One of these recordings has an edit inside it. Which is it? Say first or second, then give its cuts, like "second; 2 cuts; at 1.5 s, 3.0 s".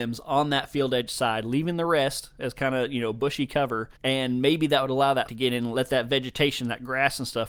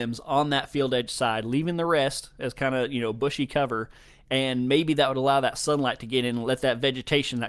first; 2 cuts; at 4.0 s, 5.3 s